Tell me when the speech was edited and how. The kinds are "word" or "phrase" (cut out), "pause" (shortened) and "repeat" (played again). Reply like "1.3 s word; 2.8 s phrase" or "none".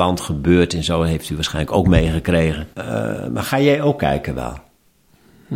2.7 s pause